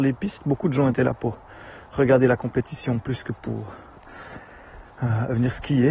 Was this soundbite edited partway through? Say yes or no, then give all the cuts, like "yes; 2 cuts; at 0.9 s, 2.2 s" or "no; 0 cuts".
no; 0 cuts